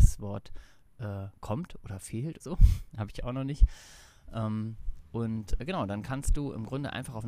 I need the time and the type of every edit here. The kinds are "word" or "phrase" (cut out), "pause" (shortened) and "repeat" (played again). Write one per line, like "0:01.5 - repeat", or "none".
0:02.4 - phrase